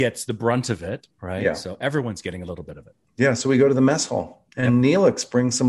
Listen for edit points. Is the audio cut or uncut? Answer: cut